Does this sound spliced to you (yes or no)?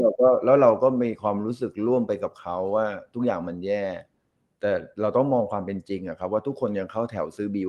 no